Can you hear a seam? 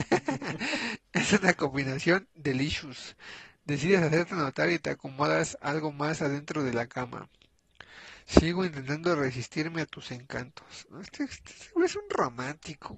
no; 0 cuts

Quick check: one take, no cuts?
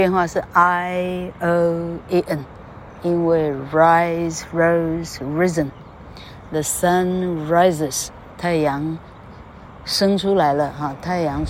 yes; 0 cuts

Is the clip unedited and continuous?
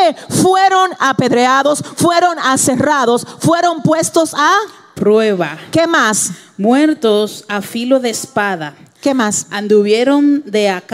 yes; 0 cuts

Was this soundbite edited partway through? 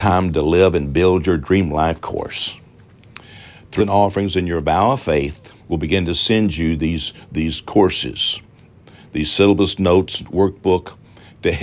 yes; 2 cuts; at 3.8 s, 5.6 s

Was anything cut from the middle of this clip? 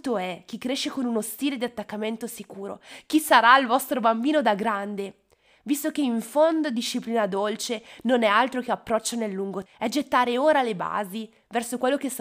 yes; 1 cut; at 9.7 s

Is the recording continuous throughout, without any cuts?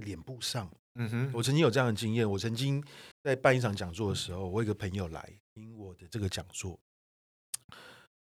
no; 1 cut; at 3.1 s

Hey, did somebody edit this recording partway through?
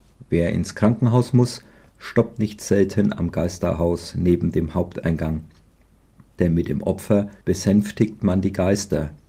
yes; 1 cut; at 7.4 s

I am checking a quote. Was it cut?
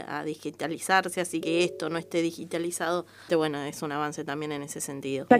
yes; 2 cuts; at 1.4 s, 3.3 s

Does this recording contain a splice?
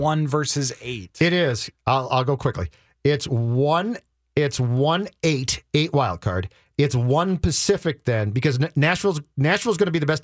no; 0 cuts

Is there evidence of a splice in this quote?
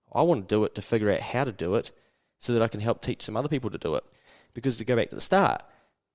no; 0 cuts

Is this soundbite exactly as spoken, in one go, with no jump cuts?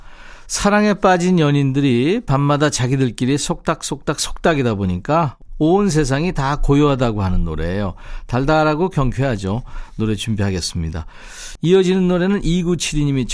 yes; 0 cuts

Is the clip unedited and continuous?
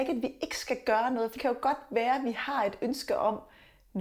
no; 1 cut; at 1.4 s

